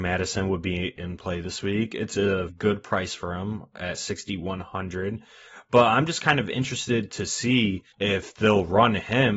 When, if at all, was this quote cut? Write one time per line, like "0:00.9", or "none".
0:02.5
0:07.9